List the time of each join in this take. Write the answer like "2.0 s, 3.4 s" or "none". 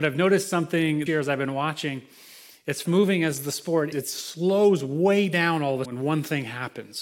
1.1 s, 2.8 s, 3.9 s, 5.8 s